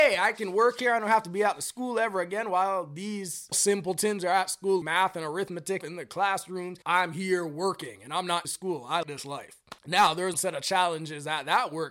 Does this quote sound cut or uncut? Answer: cut